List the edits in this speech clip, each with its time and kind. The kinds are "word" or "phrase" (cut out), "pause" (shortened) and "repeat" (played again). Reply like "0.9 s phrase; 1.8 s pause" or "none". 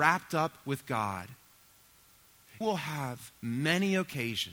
2.6 s word

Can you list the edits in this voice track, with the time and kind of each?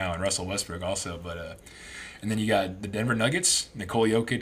none

